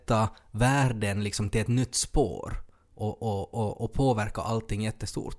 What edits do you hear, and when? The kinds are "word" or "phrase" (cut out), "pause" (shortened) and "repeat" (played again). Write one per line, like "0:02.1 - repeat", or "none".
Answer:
none